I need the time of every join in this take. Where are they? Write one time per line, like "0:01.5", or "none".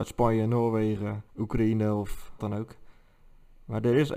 0:01.3
0:02.4